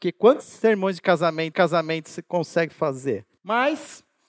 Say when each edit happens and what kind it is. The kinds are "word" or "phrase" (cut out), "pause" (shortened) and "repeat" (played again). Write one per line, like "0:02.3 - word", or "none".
0:01.5 - repeat
0:03.4 - pause